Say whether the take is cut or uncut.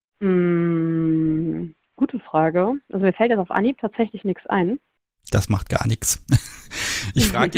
cut